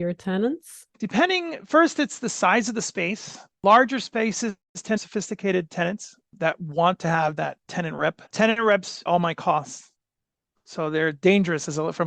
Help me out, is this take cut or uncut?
cut